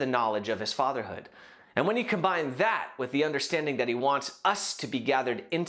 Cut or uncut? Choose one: uncut